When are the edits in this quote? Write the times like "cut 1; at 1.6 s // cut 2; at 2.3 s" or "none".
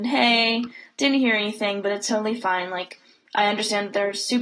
none